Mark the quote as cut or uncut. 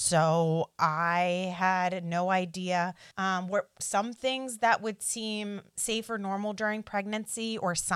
cut